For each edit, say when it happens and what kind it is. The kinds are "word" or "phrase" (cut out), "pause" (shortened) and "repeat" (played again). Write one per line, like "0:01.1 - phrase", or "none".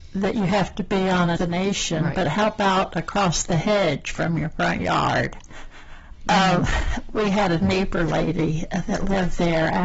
0:01.4 - phrase